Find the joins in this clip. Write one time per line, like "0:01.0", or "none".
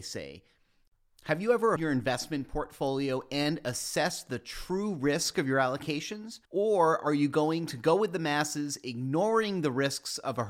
0:01.8
0:06.4